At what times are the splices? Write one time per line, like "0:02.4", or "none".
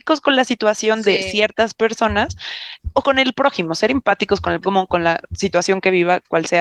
0:03.0
0:04.6